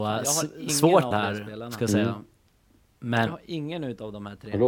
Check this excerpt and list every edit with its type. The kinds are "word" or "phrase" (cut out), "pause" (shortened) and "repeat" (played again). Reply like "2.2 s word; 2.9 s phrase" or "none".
1.1 s word; 3.3 s word

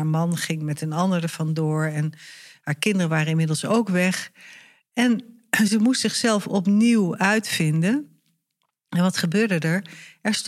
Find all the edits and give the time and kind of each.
none

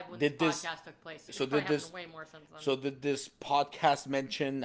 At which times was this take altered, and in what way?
1.3 s word

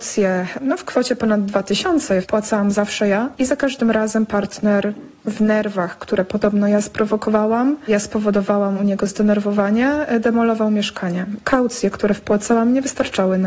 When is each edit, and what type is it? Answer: none

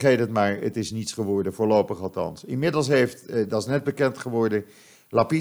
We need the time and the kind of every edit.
none

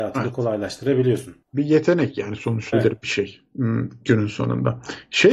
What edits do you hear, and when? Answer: 1.4 s pause; 2.7 s phrase

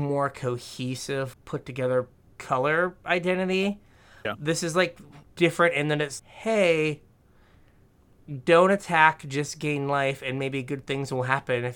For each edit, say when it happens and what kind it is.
1.3 s word; 2.3 s word; 4.2 s word; 5.2 s pause; 6.2 s word

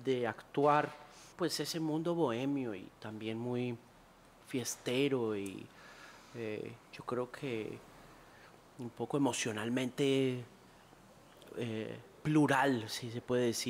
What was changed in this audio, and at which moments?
1.3 s word; 4.2 s pause; 6.9 s pause

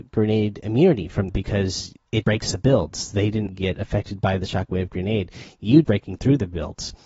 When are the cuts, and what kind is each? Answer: 1.3 s phrase; 2.2 s word; 3.5 s word; 5.8 s phrase

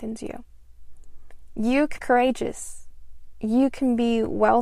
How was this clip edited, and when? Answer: 2.0 s word

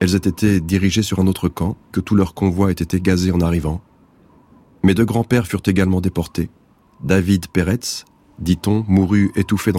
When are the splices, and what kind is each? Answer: 1.9 s phrase

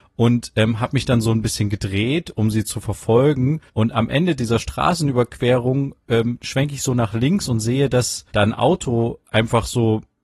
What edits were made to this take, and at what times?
3.7 s pause; 8.3 s pause

